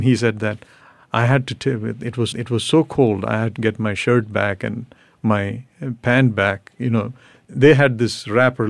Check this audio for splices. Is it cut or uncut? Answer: cut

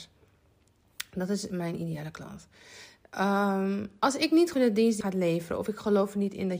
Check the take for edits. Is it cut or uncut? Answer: cut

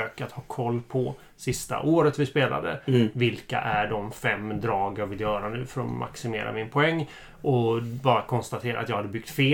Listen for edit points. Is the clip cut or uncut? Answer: uncut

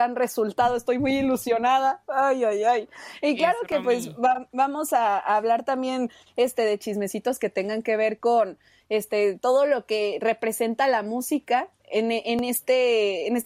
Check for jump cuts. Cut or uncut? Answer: uncut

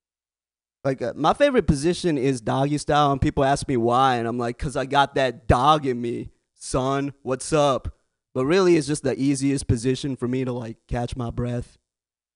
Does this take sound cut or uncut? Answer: uncut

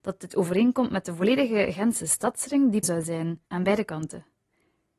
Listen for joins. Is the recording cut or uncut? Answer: cut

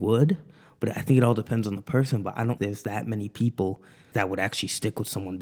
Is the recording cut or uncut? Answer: cut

